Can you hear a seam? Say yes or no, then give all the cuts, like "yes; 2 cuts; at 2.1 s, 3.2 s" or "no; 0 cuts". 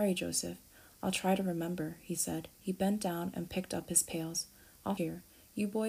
yes; 2 cuts; at 2.5 s, 5.0 s